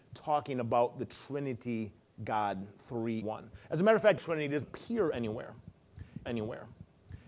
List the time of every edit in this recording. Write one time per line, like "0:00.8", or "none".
0:02.0
0:03.2
0:04.2
0:04.6
0:06.3